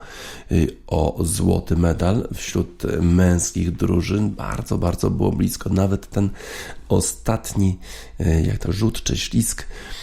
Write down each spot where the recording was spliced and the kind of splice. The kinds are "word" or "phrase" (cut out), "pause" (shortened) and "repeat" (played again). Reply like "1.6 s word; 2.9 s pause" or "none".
8.6 s word